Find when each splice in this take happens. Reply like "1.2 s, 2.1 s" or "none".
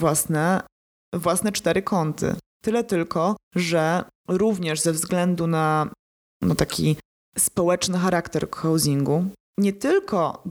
none